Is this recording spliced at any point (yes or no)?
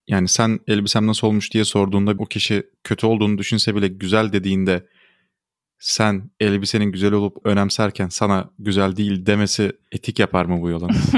yes